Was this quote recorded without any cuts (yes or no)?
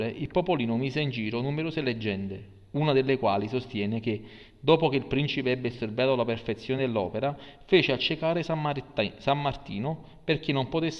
yes